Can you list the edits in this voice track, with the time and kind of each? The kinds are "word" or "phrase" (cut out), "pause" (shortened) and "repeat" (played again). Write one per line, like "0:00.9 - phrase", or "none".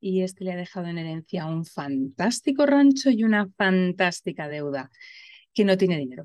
none